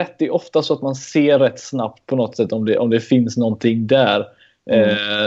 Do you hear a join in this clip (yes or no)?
no